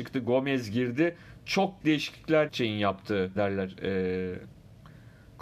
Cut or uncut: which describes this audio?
cut